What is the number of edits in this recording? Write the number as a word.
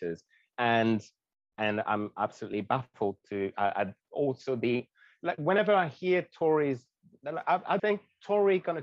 one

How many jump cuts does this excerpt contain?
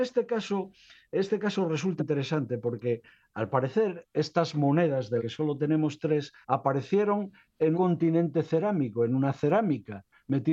four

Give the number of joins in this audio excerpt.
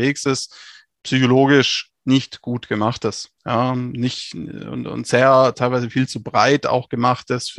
one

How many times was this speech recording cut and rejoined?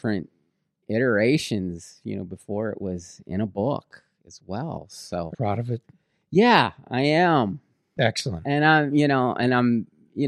one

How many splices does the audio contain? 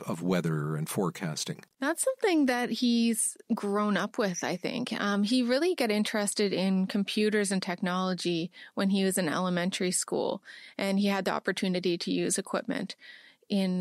zero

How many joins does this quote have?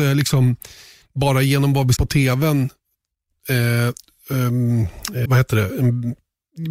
two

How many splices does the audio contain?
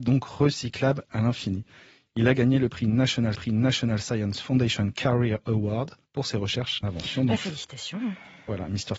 three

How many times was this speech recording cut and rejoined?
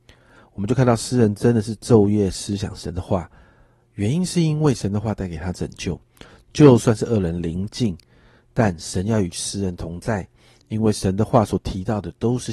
zero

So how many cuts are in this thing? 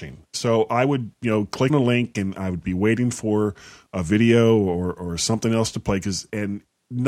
one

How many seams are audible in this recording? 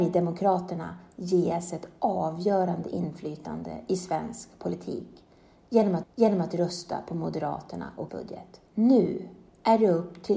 three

